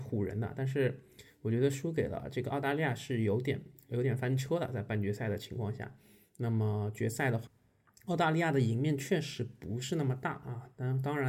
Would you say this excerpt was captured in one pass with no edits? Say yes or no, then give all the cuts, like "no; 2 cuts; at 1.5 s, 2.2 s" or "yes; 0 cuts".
yes; 0 cuts